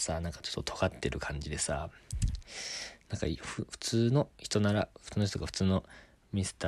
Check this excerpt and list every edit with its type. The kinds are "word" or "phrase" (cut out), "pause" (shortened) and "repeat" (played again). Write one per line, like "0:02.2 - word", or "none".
0:04.3 - pause